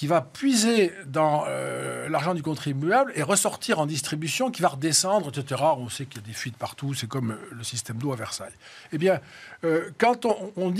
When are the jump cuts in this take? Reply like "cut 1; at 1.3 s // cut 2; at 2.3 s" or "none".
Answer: none